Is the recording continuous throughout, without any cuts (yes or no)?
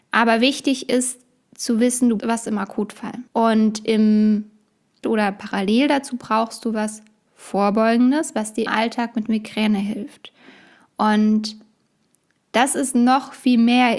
no